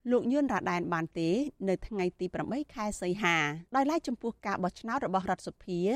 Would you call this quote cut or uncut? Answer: cut